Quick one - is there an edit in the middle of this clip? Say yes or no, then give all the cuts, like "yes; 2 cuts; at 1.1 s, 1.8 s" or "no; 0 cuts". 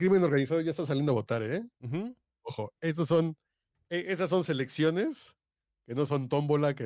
no; 0 cuts